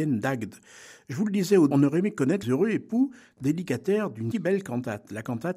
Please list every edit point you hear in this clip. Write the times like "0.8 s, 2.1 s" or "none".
1.7 s, 2.4 s, 4.3 s